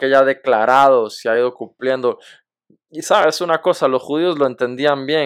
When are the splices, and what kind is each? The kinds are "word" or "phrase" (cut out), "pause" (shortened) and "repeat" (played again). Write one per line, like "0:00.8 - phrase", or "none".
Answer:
none